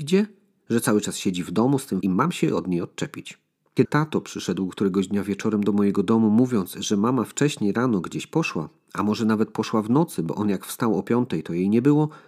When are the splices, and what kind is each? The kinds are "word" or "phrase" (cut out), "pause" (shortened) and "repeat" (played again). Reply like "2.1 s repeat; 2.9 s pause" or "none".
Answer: 2.0 s word; 3.8 s word